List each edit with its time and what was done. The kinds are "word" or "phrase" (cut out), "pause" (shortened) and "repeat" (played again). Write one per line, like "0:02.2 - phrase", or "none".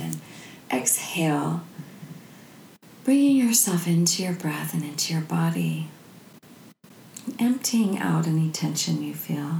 none